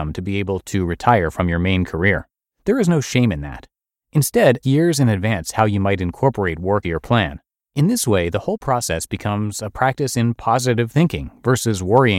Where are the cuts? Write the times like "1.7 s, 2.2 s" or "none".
4.6 s, 6.8 s, 7.6 s